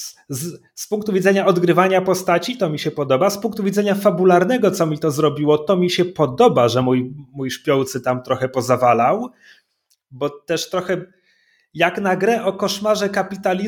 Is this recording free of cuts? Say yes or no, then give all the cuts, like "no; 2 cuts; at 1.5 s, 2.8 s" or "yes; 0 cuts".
yes; 0 cuts